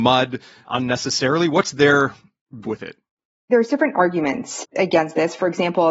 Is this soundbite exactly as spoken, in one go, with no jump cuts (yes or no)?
no